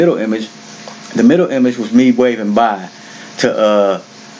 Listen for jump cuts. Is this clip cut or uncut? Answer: uncut